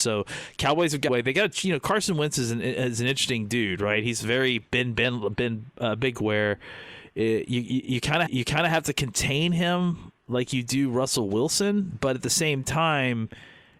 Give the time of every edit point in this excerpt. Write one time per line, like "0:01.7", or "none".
0:01.1
0:06.1
0:08.3
0:10.2